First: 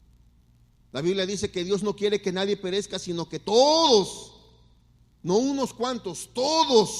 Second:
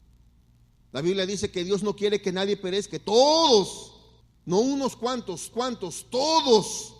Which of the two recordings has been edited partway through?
second; 3 cuts; at 2.9 s, 4.2 s, 5.5 s

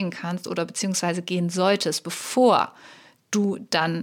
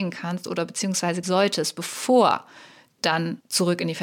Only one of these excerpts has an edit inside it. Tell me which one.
second; 2 cuts; at 1.2 s, 3.0 s

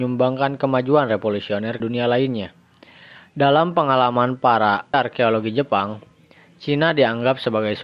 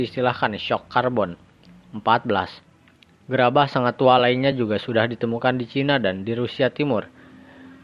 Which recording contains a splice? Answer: first; 2 cuts; at 1.8 s, 4.9 s

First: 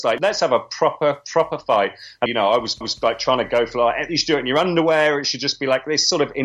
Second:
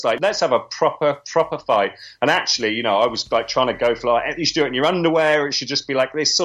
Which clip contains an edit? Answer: first; 2 cuts; at 2.3 s, 2.8 s

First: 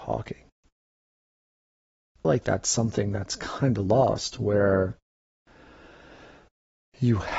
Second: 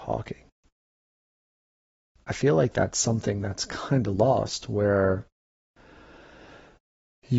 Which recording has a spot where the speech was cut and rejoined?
first; 1 cut; at 2.2 s

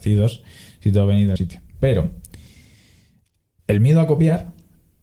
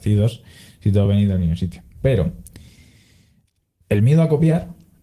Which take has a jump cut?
first; 1 cut; at 1.4 s

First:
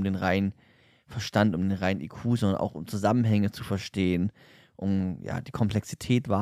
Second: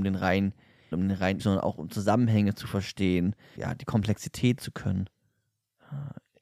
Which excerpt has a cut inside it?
second; 4 cuts; at 0.9 s, 1.4 s, 3.6 s, 4.6 s

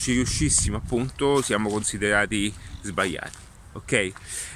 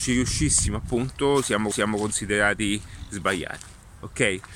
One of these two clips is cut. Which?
second; 1 cut; at 1.7 s

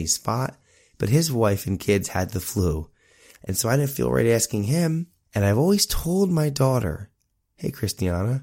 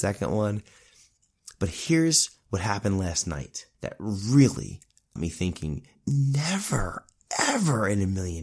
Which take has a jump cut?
second; 2 cuts; at 3.7 s, 5.2 s

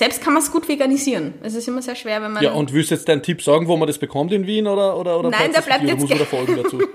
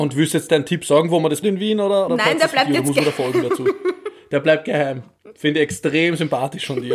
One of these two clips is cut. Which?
second; 2 cuts; at 1.4 s, 2.1 s

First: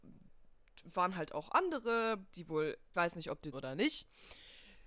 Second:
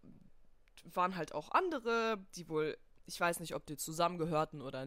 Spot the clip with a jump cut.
first; 2 cuts; at 2.9 s, 3.5 s

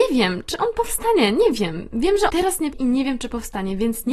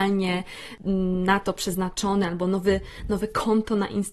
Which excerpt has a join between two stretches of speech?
first; 2 cuts; at 2.3 s, 2.7 s

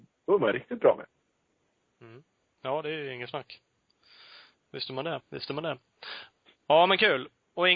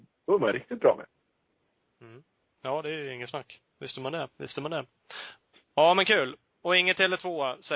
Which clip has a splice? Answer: second; 1 cut; at 3.7 s

